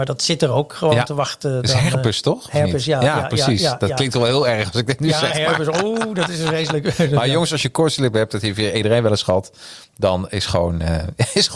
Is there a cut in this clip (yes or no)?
no